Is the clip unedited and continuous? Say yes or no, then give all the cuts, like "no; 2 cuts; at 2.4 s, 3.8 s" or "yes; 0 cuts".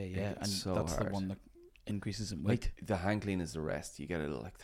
yes; 0 cuts